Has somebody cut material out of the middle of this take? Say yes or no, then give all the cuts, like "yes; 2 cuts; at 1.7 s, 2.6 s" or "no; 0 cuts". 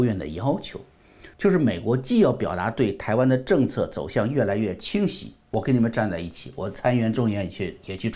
yes; 1 cut; at 1.3 s